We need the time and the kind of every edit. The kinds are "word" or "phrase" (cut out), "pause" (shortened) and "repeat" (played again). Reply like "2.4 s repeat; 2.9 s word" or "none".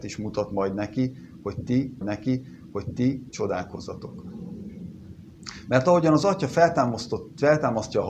2.0 s repeat